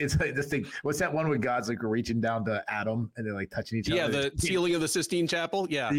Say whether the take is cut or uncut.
uncut